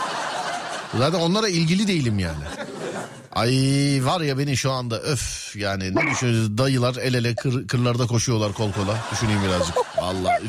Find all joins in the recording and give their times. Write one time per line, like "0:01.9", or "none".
none